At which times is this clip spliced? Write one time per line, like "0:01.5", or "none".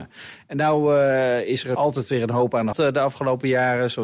0:02.7